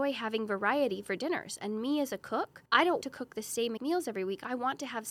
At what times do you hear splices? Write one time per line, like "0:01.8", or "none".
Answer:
0:02.7
0:03.0
0:03.8